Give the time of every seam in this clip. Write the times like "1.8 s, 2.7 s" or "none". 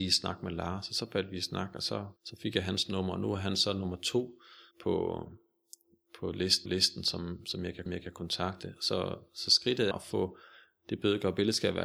2.2 s, 4.7 s, 6.7 s, 7.9 s, 9.9 s